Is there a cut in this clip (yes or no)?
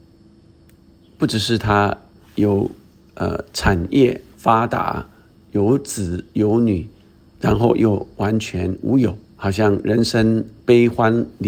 yes